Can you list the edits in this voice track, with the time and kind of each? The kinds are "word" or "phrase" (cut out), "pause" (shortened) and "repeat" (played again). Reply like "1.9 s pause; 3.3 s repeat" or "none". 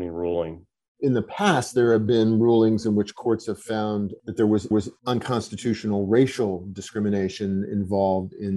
4.7 s repeat

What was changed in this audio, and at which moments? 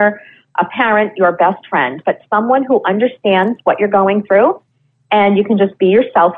none

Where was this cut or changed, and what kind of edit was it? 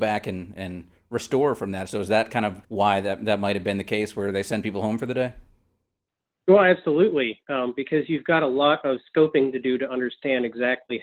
2.6 s pause

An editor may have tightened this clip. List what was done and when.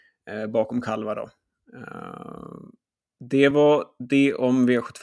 none

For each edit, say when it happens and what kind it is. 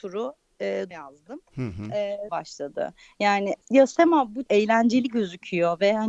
0.9 s phrase; 2.3 s phrase; 3.6 s pause; 4.5 s word

